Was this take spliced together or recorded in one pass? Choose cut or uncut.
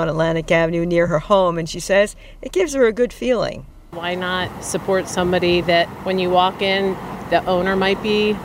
uncut